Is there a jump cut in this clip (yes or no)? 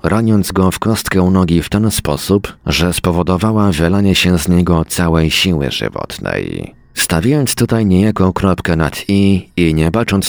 no